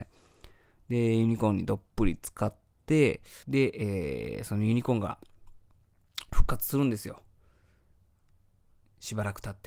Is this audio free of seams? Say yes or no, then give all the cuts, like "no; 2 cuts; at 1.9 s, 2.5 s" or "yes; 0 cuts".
no; 1 cut; at 3.4 s